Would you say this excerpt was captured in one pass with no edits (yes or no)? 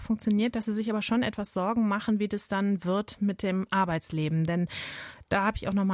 yes